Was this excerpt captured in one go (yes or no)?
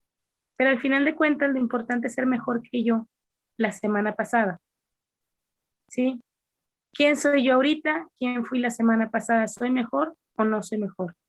yes